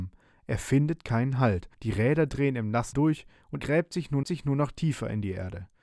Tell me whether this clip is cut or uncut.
cut